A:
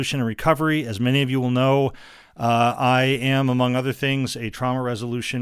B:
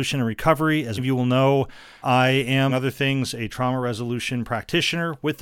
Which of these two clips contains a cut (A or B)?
B